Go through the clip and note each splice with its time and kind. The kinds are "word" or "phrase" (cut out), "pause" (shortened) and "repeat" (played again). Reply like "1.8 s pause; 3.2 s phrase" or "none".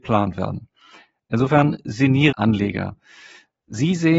2.3 s phrase